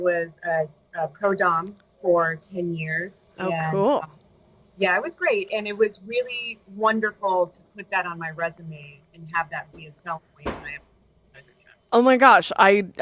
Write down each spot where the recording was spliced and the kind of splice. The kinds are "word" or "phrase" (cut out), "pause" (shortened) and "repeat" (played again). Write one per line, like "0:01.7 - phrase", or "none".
0:10.3 - pause